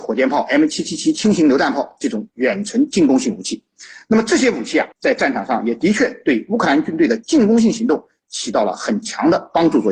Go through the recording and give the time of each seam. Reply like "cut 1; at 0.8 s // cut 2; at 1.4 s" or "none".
cut 1; at 4.9 s